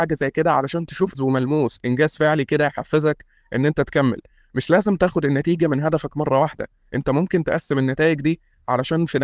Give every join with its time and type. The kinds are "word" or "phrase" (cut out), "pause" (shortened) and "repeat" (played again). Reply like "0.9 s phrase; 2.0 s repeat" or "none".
1.1 s word